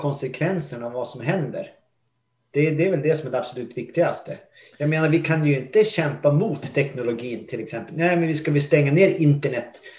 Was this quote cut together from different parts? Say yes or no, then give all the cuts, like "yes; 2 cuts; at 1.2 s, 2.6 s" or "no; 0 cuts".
no; 0 cuts